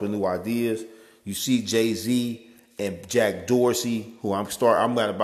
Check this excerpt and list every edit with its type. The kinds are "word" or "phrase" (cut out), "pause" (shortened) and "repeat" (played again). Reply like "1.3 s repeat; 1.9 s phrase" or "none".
none